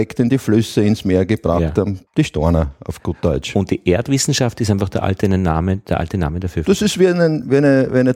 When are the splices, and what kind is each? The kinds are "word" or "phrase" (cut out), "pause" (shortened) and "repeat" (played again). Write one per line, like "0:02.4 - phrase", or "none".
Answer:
0:02.1 - pause